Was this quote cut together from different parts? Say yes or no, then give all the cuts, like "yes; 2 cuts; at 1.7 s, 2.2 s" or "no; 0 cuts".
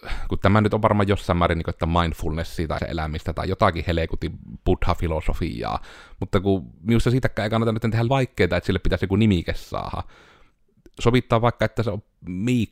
yes; 2 cuts; at 2.8 s, 8.1 s